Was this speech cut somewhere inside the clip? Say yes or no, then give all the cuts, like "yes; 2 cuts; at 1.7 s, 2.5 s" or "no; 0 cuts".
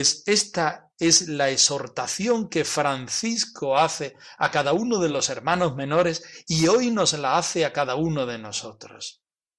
no; 0 cuts